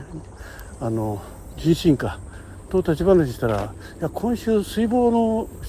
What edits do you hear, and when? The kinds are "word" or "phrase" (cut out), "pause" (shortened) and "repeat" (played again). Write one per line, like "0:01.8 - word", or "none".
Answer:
none